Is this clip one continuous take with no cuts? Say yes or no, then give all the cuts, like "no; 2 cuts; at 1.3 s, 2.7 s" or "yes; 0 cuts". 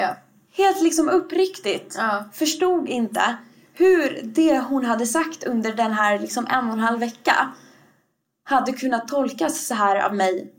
yes; 0 cuts